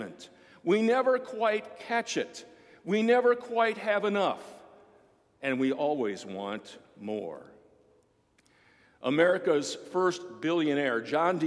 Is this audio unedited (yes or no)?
yes